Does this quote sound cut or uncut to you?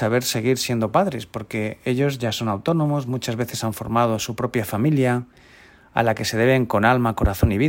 uncut